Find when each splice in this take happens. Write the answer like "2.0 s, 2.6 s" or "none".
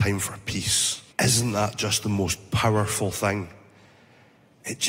1.1 s